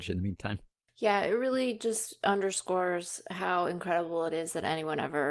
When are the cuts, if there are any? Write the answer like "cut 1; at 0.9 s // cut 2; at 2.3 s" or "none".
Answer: none